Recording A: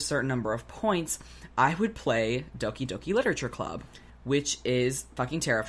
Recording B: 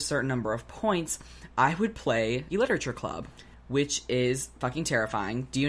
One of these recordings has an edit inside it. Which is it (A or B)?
B